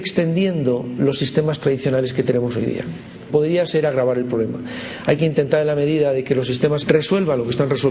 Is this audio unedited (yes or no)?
no